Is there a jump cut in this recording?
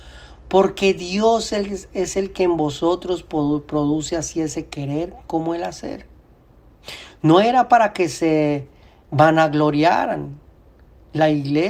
no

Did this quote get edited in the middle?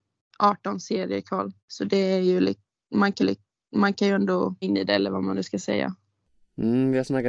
yes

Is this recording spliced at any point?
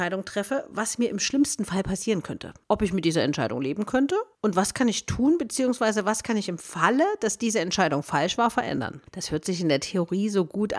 yes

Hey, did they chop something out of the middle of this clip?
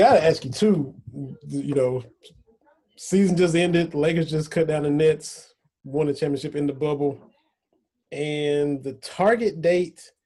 no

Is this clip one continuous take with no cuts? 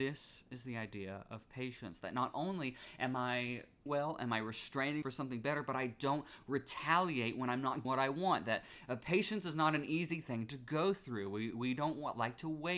no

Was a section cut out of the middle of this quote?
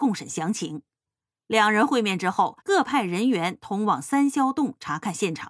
yes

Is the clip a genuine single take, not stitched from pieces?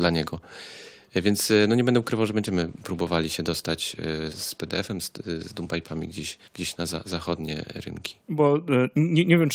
no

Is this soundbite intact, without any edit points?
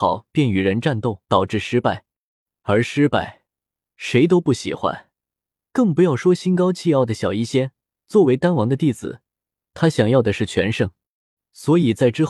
no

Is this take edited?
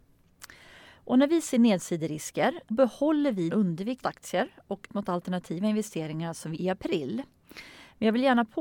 yes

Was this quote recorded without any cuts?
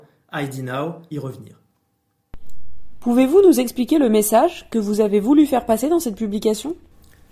no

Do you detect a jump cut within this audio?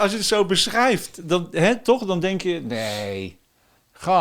no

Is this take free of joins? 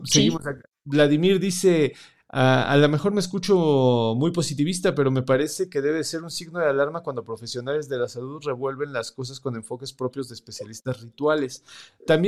yes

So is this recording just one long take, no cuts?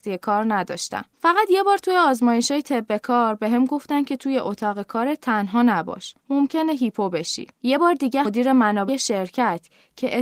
no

